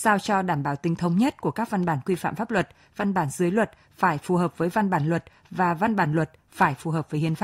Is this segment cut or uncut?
uncut